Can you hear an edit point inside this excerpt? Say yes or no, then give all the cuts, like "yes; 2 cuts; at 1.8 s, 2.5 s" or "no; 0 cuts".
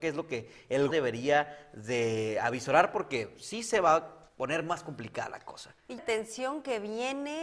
yes; 3 cuts; at 0.9 s, 4.3 s, 6.0 s